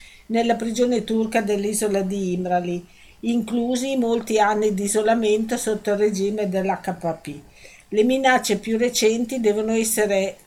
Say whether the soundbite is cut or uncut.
uncut